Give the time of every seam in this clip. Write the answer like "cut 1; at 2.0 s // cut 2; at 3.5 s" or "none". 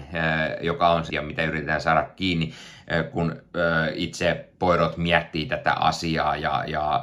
cut 1; at 1.1 s